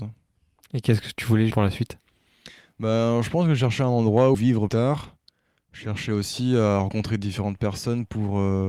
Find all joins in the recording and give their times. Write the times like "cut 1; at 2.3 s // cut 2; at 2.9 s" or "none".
cut 1; at 1.5 s // cut 2; at 4.3 s // cut 3; at 4.7 s